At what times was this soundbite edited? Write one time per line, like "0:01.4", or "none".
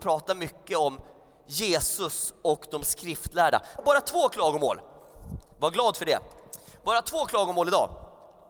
0:03.8
0:05.5